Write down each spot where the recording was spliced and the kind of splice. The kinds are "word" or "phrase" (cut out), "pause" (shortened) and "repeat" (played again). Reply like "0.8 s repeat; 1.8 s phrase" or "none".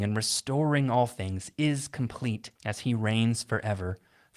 2.6 s pause